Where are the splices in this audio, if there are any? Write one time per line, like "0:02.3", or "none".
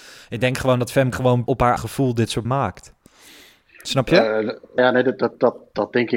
0:01.1
0:01.5
0:01.8
0:02.4
0:04.8